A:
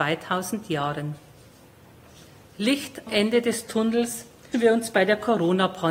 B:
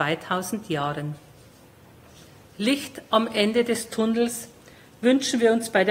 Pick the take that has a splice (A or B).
A